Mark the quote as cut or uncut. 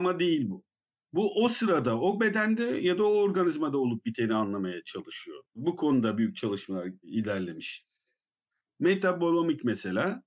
cut